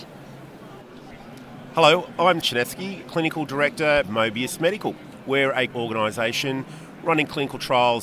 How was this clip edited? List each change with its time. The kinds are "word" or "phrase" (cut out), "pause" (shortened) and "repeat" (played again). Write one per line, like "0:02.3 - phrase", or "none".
0:02.4 - word
0:03.0 - word
0:04.0 - phrase
0:05.7 - phrase